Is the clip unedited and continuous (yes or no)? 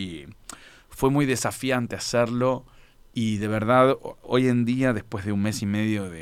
yes